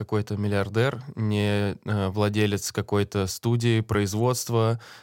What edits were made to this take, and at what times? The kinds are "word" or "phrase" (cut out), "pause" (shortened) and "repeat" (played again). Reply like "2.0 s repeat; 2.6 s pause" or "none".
none